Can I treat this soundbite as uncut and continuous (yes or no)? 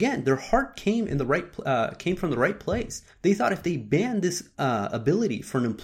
no